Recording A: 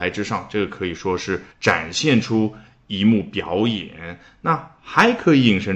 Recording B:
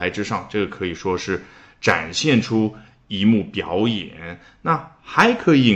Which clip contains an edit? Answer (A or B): A